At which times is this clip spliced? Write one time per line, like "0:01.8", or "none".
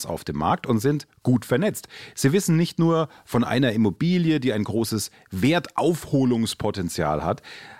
none